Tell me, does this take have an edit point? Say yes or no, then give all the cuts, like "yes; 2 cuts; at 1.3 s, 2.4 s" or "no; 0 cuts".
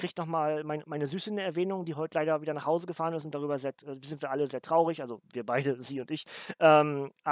no; 0 cuts